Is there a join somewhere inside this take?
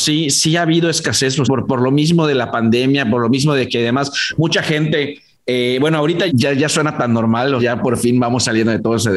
yes; 3 cuts; at 1.4 s, 6.3 s, 7.6 s

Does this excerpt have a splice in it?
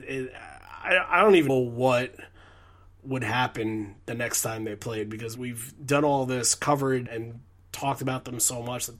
yes; 3 cuts; at 1.5 s, 5.4 s, 7.1 s

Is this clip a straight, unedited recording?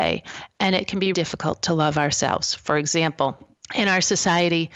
no; 2 cuts; at 1.1 s, 3.5 s

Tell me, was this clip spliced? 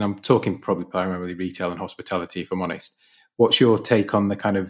no; 0 cuts

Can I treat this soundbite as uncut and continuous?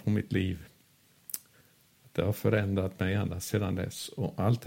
yes; 0 cuts

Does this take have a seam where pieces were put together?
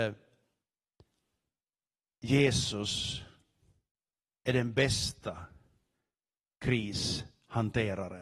no; 0 cuts

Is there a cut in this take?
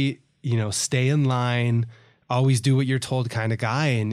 no; 0 cuts

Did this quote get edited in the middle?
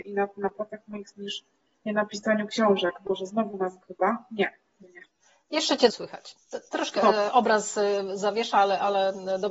yes; 6 cuts; at 1.1 s, 1.9 s, 3.8 s, 4.8 s, 5.9 s, 7.0 s

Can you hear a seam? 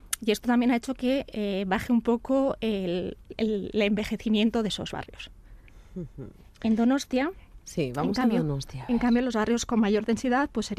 no; 0 cuts

